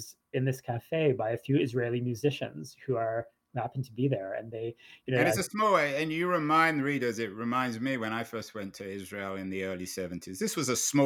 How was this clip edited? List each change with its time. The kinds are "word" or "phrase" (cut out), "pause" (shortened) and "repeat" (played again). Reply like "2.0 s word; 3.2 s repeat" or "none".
none